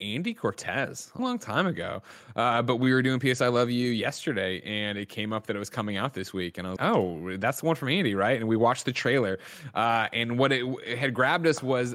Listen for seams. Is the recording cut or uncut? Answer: cut